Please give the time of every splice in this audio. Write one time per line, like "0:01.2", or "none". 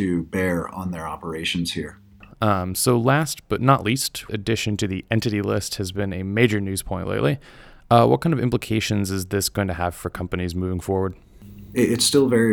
0:04.3